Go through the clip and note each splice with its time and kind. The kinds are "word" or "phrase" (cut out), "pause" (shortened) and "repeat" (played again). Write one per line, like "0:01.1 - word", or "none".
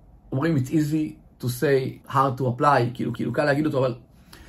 0:02.0 - pause
0:03.1 - repeat